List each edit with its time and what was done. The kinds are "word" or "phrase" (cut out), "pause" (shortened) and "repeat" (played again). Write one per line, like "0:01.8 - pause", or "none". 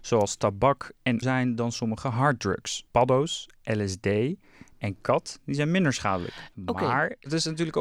0:01.2 - phrase
0:02.9 - pause